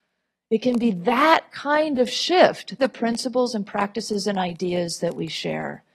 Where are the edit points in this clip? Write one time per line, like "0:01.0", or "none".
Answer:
0:02.8

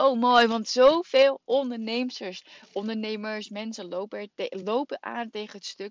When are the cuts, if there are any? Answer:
none

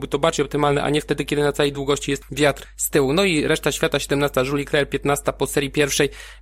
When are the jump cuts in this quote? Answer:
none

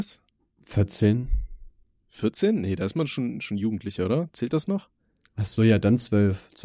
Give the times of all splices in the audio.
none

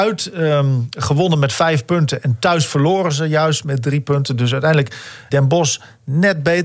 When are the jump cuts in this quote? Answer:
0:03.6
0:05.3

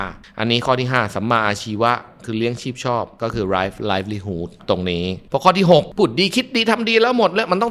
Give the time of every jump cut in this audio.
none

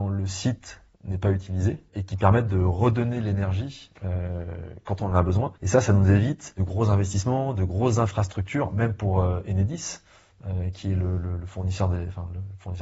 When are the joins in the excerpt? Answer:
0:05.6

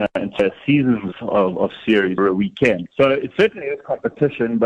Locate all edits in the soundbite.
0:01.1
0:02.2
0:02.9

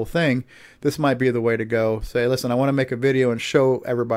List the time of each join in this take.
none

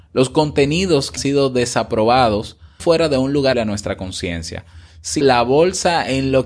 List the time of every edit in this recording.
0:01.2
0:02.8
0:03.5
0:05.2

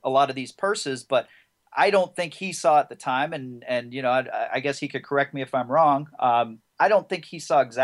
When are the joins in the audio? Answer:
none

